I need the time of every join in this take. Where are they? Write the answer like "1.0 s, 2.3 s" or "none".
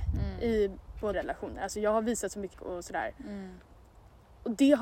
1.1 s, 2.5 s